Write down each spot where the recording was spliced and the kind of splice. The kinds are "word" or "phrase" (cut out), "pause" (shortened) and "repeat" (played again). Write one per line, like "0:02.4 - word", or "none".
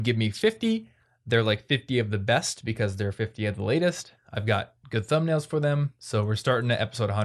none